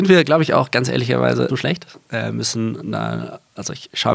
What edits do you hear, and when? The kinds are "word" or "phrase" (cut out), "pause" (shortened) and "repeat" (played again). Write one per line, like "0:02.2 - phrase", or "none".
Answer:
0:01.5 - phrase